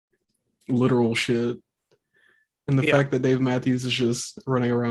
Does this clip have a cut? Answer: no; 0 cuts

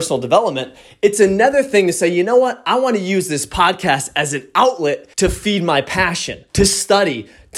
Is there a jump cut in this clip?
yes; 2 cuts; at 5.1 s, 6.5 s

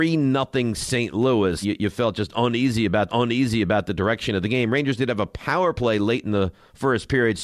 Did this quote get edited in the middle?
yes; 2 cuts; at 1.6 s, 3.1 s

